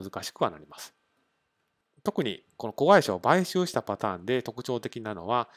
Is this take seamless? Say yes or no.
yes